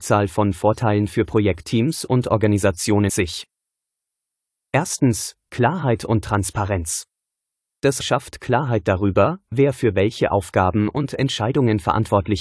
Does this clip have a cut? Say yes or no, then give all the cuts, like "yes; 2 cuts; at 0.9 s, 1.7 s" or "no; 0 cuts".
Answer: yes; 2 cuts; at 3.1 s, 8.0 s